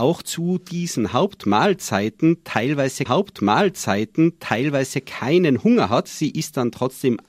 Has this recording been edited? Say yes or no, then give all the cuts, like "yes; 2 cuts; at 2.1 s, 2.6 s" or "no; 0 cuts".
yes; 1 cut; at 3.1 s